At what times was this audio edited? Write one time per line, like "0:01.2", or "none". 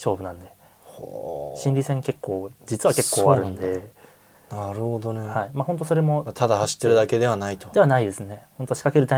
0:02.6